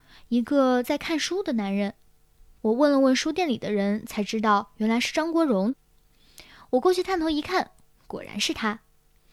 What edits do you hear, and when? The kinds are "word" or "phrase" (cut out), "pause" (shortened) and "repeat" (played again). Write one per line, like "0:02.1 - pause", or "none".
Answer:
none